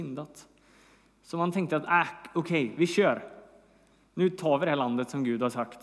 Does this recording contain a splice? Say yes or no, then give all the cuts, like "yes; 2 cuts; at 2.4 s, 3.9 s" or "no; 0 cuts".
no; 0 cuts